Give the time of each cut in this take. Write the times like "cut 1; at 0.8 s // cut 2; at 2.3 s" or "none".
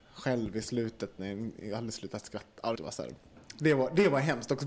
cut 1; at 2.8 s

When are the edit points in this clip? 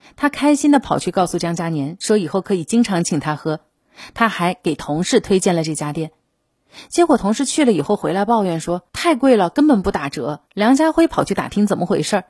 cut 1; at 8.9 s // cut 2; at 10.5 s

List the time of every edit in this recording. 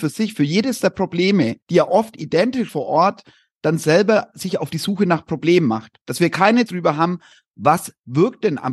cut 1; at 1.6 s // cut 2; at 2.7 s // cut 3; at 6.0 s // cut 4; at 6.7 s

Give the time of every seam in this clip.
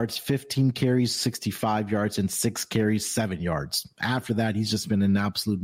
none

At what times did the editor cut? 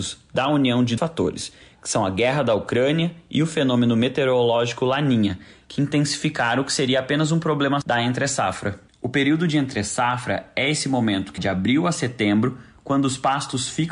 cut 1; at 1.0 s // cut 2; at 7.8 s // cut 3; at 11.4 s

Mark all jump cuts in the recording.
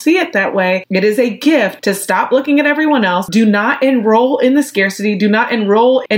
none

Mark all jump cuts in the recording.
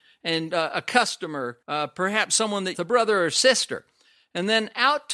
cut 1; at 1.6 s // cut 2; at 2.7 s

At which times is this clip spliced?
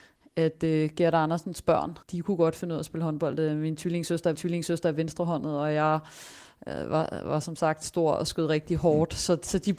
cut 1; at 2.0 s // cut 2; at 4.3 s

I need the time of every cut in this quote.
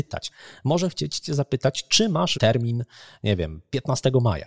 cut 1; at 2.3 s

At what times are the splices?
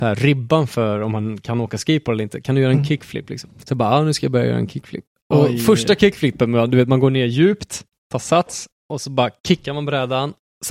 cut 1; at 3.6 s

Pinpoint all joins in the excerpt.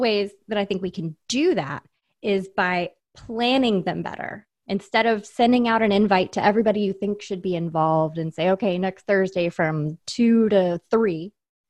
none

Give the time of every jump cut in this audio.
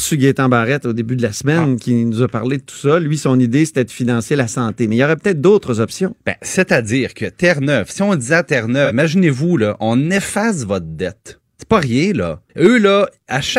cut 1; at 11.5 s // cut 2; at 12.5 s

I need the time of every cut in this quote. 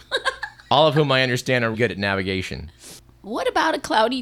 cut 1; at 1.7 s

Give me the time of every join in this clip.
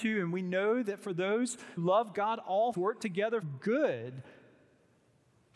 cut 1; at 1.8 s // cut 2; at 2.7 s // cut 3; at 3.4 s

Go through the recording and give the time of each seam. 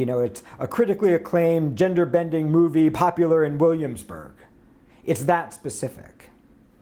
none

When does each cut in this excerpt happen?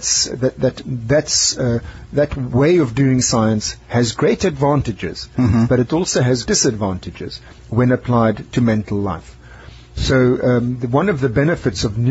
cut 1; at 6.4 s // cut 2; at 8.5 s

